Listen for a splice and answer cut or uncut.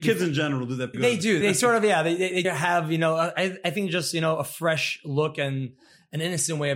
cut